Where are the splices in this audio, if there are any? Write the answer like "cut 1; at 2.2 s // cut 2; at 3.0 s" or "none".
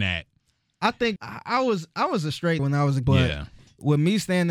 cut 1; at 1.2 s // cut 2; at 2.6 s // cut 3; at 3.0 s